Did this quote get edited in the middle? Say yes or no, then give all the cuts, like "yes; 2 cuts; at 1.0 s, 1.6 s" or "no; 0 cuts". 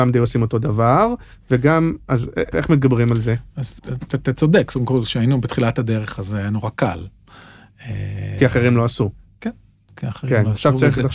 yes; 2 cuts; at 2.5 s, 3.8 s